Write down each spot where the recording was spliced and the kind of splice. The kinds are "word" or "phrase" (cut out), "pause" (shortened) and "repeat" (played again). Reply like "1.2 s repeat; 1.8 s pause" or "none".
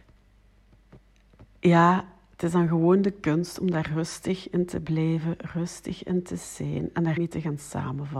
7.2 s word